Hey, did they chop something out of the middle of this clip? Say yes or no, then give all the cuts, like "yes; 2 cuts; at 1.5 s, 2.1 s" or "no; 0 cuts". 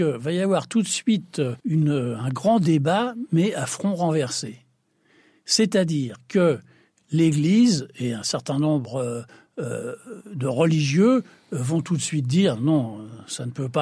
yes; 1 cut; at 1.6 s